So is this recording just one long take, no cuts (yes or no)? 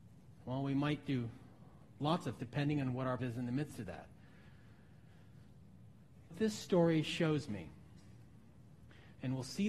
no